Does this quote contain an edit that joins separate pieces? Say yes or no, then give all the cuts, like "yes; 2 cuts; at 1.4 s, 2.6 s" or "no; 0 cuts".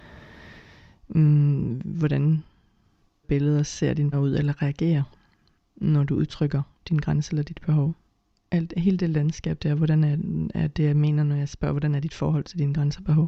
yes; 2 cuts; at 3.2 s, 4.1 s